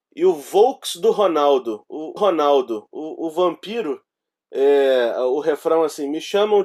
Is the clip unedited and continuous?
no; 1 cut; at 2.2 s

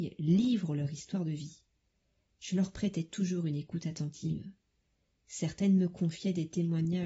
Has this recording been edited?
no; 0 cuts

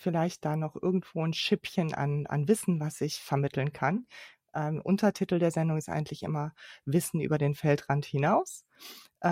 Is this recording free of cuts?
yes; 0 cuts

